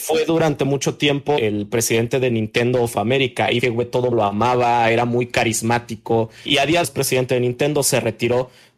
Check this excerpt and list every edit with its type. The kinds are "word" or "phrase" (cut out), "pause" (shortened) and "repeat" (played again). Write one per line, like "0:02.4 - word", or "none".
0:01.4 - word
0:03.6 - phrase
0:04.1 - word
0:06.5 - word
0:06.8 - phrase